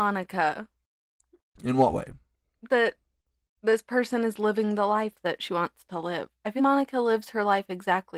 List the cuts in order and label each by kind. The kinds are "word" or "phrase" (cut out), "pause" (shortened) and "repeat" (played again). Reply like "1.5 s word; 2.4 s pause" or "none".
6.6 s word